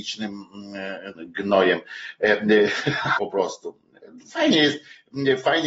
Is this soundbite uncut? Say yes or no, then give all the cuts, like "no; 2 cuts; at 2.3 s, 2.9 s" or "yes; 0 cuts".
no; 2 cuts; at 1.1 s, 3.2 s